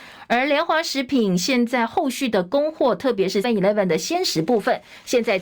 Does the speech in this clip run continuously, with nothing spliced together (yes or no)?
no